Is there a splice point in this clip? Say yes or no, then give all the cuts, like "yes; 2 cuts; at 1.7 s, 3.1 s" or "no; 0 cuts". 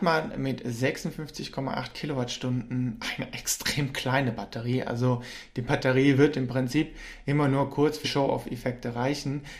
yes; 1 cut; at 8.0 s